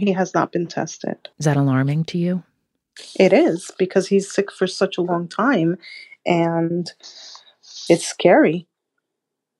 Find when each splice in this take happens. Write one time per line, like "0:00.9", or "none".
0:01.3